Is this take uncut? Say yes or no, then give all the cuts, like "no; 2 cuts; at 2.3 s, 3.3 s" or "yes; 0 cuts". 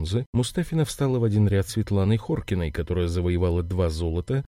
no; 1 cut; at 1.7 s